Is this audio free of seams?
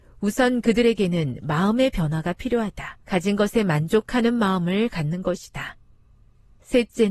no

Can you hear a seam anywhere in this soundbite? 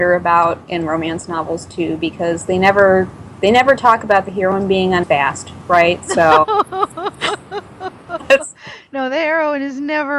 yes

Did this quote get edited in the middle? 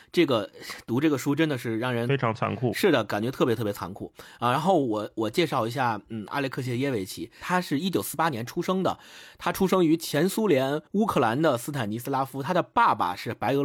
yes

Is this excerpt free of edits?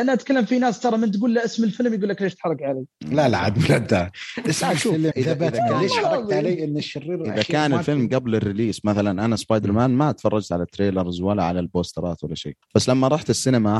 no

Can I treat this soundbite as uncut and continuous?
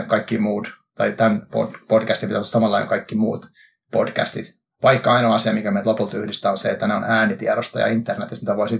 yes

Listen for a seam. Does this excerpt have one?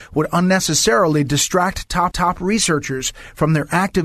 yes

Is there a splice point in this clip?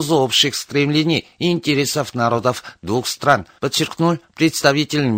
no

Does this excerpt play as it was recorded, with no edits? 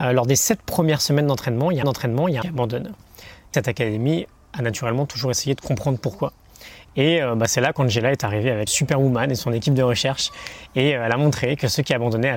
no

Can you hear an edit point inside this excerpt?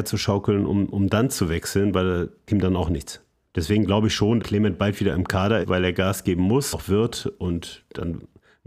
yes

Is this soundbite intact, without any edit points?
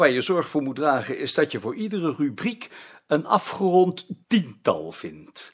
no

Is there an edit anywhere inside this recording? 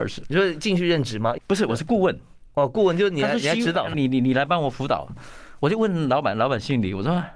yes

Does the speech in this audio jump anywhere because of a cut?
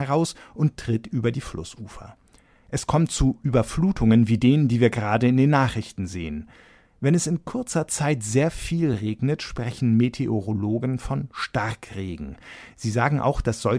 no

